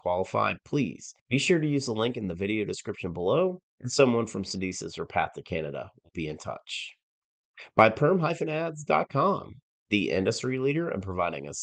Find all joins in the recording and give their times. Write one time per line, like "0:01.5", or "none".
0:01.2
0:03.7